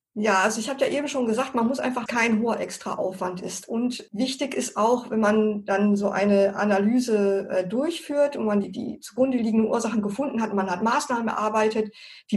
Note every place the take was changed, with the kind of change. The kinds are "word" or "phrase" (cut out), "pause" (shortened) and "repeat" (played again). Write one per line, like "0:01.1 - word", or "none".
0:02.1 - phrase